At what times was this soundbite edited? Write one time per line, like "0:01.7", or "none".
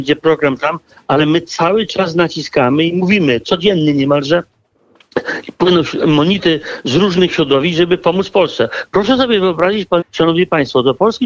0:10.0